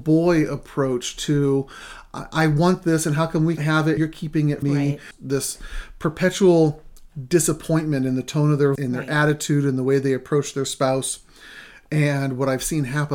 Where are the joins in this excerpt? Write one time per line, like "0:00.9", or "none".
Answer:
0:03.6
0:04.0
0:04.6
0:08.8

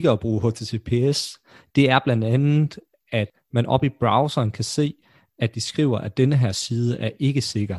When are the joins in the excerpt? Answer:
none

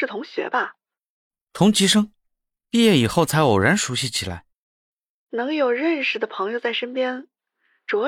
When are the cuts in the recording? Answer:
none

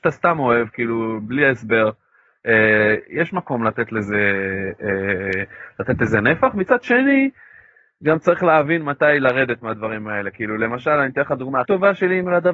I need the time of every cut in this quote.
0:11.6

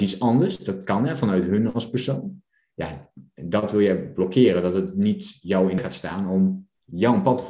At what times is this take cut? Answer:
0:05.8

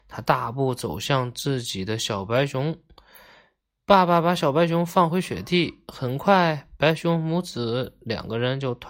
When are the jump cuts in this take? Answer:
none

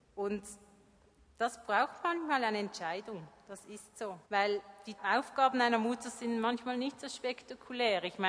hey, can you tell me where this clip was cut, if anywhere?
0:04.2
0:05.0

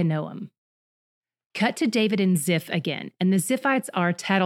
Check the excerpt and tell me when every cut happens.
none

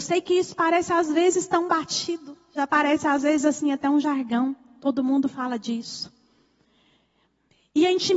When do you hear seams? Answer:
none

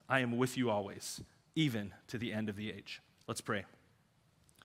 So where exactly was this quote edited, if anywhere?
none

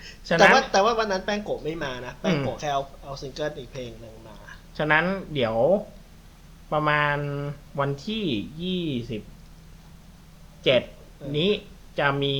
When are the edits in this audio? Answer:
0:07.7

